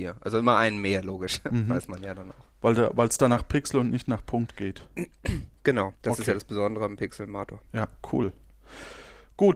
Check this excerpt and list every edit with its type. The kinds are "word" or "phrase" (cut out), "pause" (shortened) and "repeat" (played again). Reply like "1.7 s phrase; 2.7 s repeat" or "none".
5.9 s pause; 7.7 s pause